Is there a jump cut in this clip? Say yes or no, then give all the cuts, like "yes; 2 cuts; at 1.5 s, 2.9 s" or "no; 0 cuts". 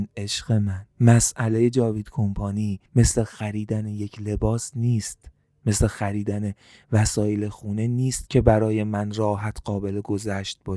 yes; 2 cuts; at 0.9 s, 2.9 s